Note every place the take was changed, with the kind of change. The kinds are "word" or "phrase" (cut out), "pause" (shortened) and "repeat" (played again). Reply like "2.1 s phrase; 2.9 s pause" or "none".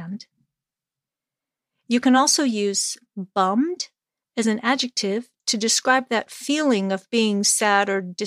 none